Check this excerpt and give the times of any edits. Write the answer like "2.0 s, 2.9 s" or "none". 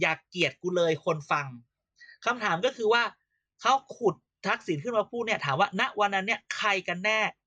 none